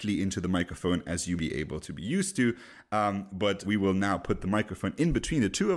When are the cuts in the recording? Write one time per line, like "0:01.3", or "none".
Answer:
0:01.4
0:03.6